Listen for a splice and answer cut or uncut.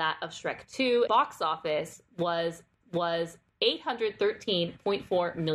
cut